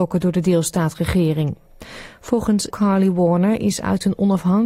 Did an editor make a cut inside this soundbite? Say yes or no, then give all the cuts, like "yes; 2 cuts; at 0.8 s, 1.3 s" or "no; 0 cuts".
yes; 1 cut; at 2.7 s